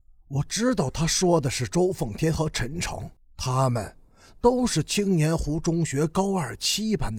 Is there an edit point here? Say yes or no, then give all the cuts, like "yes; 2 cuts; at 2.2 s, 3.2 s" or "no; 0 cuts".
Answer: yes; 1 cut; at 3.2 s